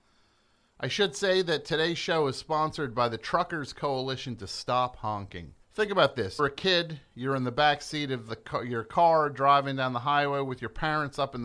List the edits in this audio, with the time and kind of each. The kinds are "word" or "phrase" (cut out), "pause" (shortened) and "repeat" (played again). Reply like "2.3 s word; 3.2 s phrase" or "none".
5.6 s pause; 6.4 s word; 8.3 s word